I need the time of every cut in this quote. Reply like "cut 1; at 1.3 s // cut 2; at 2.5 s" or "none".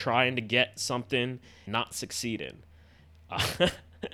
cut 1; at 1.7 s